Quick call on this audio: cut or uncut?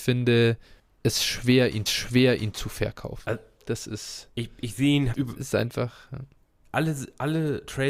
cut